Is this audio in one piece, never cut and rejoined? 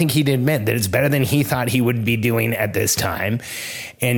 yes; 0 cuts

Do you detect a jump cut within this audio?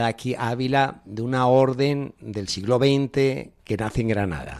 no; 0 cuts

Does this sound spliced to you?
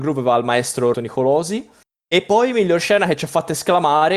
yes; 1 cut; at 0.9 s

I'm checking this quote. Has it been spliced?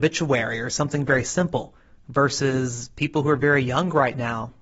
no; 0 cuts

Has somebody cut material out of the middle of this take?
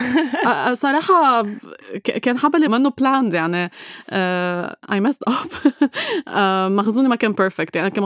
yes; 1 cut; at 2.7 s

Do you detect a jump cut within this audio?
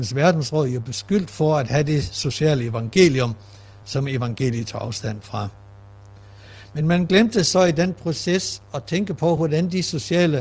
no; 0 cuts

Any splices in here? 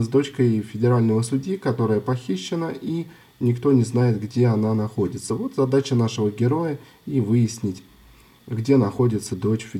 no; 0 cuts

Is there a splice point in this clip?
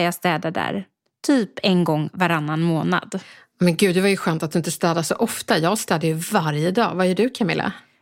no; 0 cuts

